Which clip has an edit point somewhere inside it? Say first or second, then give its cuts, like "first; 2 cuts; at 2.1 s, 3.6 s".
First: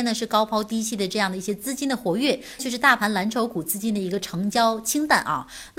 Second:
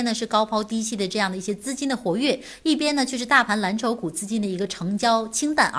first; 1 cut; at 2.6 s